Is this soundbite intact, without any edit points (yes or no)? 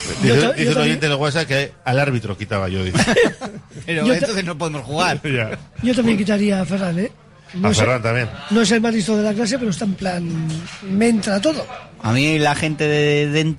yes